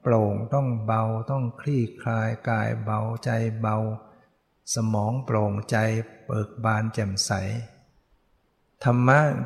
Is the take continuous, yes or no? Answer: yes